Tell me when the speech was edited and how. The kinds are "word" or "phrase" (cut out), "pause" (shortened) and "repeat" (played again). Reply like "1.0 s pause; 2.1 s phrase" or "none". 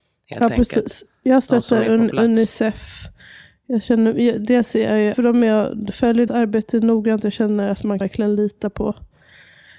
5.1 s word; 6.3 s word; 8.0 s word